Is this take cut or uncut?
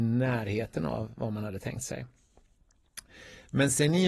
uncut